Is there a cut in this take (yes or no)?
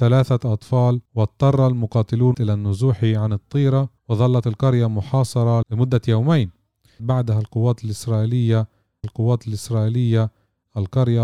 yes